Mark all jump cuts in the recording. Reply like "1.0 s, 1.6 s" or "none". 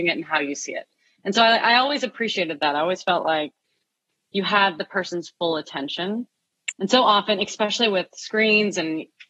none